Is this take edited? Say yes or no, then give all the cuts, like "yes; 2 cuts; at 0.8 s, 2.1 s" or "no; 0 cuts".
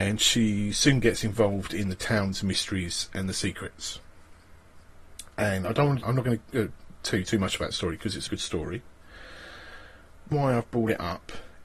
yes; 3 cuts; at 6.0 s, 8.3 s, 10.3 s